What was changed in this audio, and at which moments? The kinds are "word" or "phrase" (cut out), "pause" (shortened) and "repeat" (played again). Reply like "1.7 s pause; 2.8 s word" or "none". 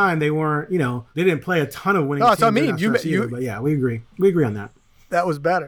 1.1 s pause